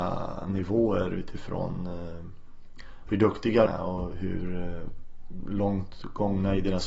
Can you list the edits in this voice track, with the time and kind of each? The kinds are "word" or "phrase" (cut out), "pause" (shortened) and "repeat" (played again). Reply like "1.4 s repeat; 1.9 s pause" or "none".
3.7 s word